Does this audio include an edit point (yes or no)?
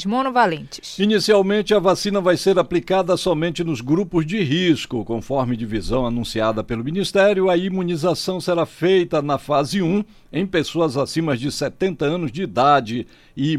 no